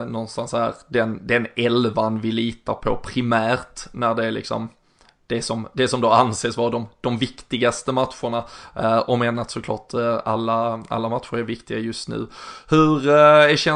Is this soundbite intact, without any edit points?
yes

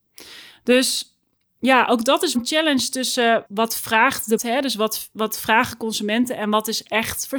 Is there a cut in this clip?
yes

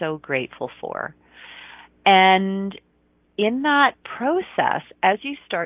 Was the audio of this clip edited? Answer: no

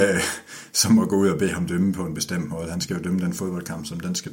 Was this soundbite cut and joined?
no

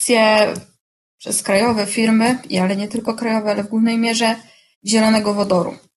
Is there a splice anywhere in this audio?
no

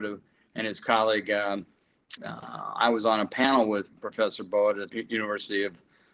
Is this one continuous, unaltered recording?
no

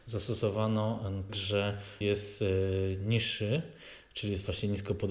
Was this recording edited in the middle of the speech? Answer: yes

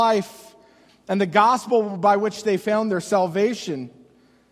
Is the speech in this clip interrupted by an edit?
no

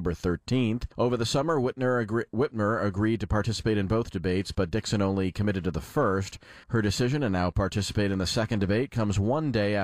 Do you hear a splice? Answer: yes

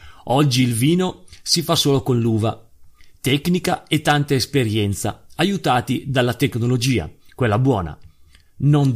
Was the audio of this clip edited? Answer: no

